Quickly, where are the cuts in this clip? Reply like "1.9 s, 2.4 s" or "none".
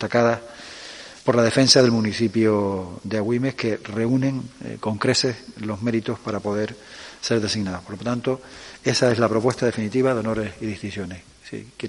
none